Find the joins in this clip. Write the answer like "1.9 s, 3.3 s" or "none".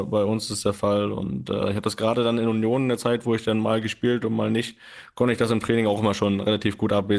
none